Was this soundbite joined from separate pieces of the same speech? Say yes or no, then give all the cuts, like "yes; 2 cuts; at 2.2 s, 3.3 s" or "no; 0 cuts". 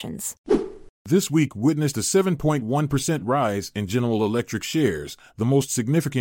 yes; 1 cut; at 1.0 s